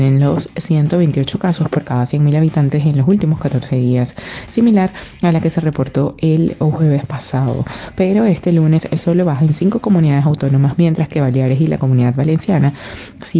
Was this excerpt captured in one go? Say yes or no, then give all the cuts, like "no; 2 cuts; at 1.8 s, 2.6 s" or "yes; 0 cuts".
yes; 0 cuts